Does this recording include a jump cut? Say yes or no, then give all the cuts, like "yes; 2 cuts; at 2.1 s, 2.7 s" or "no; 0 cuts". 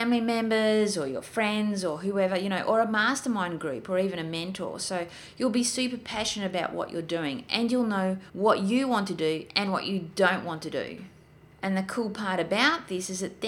no; 0 cuts